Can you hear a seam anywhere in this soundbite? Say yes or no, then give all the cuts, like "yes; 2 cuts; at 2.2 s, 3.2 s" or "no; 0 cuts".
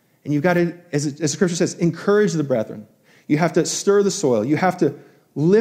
no; 0 cuts